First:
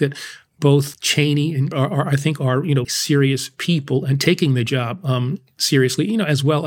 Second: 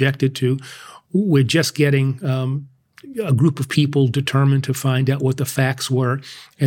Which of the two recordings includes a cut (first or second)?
first